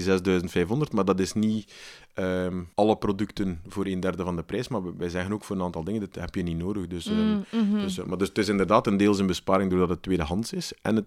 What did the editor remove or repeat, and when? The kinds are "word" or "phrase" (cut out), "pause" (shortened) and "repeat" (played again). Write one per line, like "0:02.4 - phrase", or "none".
0:02.7 - pause